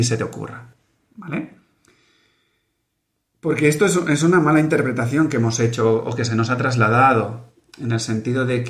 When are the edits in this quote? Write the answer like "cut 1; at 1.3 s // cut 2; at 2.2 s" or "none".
none